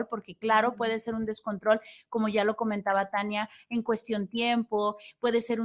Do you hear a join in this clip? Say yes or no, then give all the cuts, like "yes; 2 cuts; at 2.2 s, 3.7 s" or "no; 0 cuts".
no; 0 cuts